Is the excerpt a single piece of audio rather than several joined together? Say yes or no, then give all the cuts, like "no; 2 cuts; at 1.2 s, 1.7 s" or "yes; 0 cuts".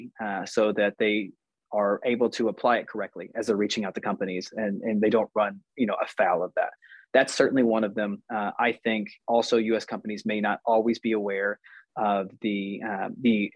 yes; 0 cuts